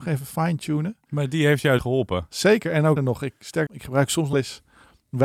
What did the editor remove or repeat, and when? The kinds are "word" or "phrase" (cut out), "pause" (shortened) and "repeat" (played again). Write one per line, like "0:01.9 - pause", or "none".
0:01.8 - word
0:03.0 - word
0:03.7 - word
0:04.3 - word